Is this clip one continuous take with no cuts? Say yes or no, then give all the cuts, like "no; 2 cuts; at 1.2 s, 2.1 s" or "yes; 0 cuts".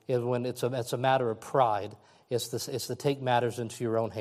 yes; 0 cuts